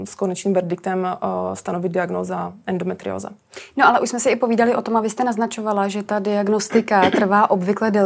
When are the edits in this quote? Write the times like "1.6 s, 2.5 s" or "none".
none